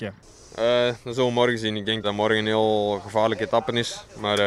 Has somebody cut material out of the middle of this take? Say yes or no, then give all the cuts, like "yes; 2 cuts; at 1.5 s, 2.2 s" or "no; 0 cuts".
yes; 1 cut; at 2.0 s